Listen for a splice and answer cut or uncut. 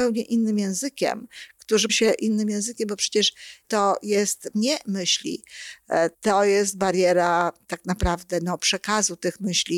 cut